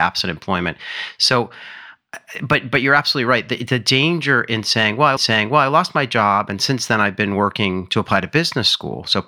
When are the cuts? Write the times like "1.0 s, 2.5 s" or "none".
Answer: 5.2 s